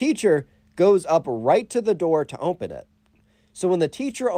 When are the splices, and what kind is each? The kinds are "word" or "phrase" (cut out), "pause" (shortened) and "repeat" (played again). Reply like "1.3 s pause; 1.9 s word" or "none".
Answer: none